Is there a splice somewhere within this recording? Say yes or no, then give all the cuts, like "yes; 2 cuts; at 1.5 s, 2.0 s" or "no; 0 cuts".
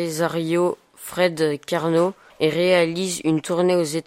yes; 1 cut; at 2.3 s